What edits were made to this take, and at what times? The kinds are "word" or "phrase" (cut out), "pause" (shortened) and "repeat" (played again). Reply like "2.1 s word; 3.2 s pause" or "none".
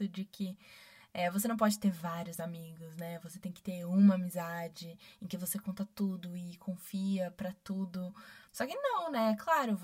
8.5 s pause